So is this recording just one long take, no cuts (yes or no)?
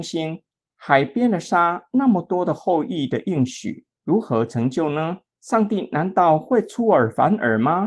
no